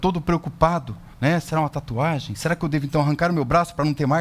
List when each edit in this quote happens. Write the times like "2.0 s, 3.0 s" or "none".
1.1 s